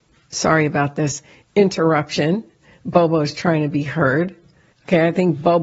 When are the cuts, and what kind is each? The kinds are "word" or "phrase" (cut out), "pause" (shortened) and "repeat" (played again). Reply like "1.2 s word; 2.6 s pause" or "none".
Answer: none